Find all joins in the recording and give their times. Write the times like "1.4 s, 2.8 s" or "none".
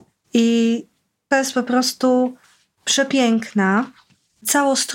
1.3 s